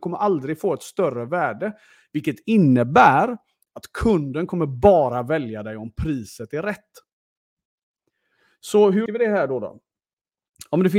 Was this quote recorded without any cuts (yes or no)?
no